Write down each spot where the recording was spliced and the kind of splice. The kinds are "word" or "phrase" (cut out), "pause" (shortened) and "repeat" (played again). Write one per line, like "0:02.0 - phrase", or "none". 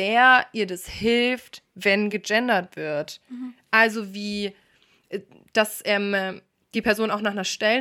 none